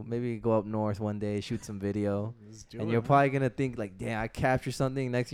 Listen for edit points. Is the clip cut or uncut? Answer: uncut